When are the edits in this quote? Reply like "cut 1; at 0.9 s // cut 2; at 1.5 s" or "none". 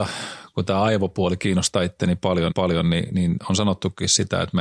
cut 1; at 2.5 s